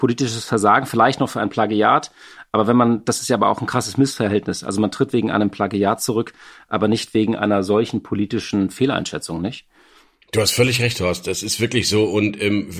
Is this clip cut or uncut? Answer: uncut